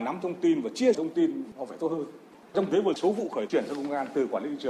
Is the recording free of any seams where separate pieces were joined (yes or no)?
no